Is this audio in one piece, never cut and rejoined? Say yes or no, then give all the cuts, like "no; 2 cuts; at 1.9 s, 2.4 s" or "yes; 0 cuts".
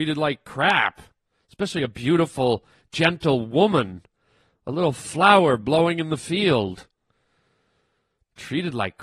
yes; 0 cuts